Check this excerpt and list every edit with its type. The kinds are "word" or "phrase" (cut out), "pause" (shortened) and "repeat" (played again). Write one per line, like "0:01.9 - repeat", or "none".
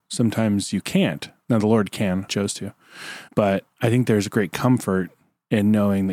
0:02.3 - phrase
0:03.3 - pause